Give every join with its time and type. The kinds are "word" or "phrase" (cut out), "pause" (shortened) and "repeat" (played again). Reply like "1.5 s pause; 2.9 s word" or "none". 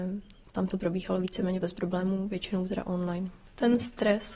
1.6 s word